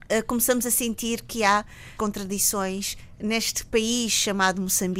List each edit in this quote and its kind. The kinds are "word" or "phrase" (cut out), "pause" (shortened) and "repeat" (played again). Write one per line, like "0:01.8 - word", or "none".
0:02.0 - word